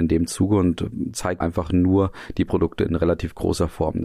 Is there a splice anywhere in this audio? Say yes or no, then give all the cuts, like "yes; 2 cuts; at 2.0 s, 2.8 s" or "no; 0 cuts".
yes; 1 cut; at 1.4 s